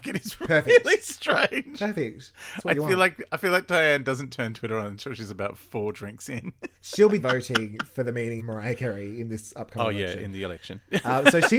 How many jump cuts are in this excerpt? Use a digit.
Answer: 3